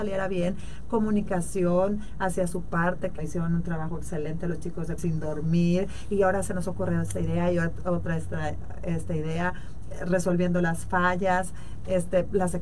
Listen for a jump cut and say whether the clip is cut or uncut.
cut